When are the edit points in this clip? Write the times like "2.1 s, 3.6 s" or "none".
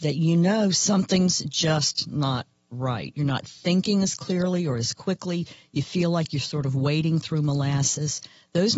none